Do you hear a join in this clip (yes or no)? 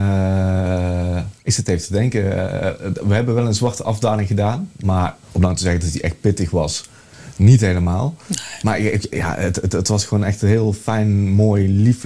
yes